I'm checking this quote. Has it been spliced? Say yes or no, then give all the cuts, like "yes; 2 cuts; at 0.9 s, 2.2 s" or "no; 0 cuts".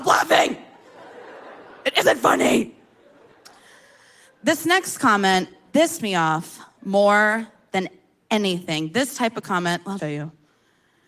yes; 2 cuts; at 6.0 s, 10.0 s